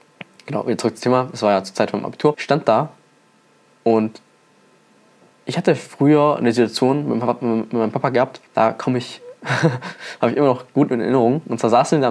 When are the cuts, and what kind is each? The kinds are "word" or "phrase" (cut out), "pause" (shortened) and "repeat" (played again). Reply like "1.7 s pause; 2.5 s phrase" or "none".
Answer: 8.5 s pause